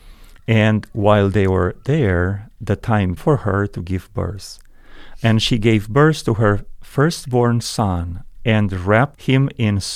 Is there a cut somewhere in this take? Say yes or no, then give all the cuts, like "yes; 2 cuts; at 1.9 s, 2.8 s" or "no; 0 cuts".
yes; 1 cut; at 3.2 s